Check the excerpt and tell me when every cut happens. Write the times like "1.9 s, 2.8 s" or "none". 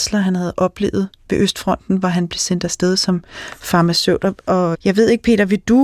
4.7 s